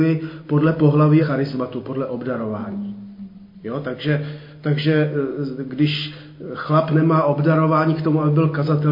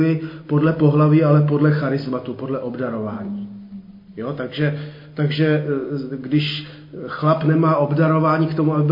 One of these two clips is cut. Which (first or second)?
first